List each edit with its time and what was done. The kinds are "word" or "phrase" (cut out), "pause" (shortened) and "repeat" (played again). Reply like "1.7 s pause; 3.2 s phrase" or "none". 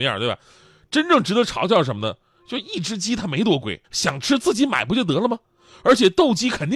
3.8 s pause